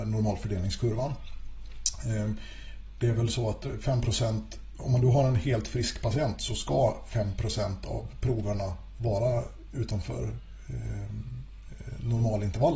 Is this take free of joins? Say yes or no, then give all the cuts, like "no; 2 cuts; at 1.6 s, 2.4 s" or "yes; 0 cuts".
yes; 0 cuts